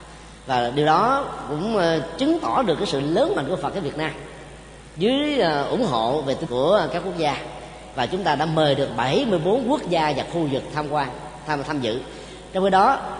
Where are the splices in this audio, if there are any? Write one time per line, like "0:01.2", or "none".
0:06.5
0:08.9